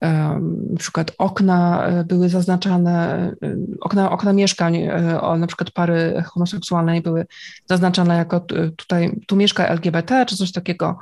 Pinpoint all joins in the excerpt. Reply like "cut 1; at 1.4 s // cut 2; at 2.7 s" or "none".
none